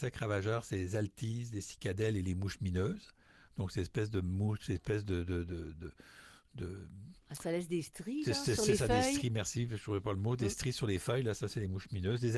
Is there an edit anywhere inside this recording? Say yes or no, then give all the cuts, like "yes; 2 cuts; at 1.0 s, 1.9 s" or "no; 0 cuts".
no; 0 cuts